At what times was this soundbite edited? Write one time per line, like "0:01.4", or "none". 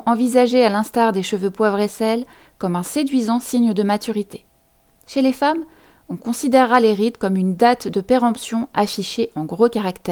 none